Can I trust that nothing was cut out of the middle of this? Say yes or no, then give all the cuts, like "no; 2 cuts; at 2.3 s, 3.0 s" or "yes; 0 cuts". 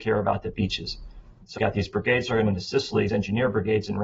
no; 3 cuts; at 1.6 s, 2.5 s, 3.1 s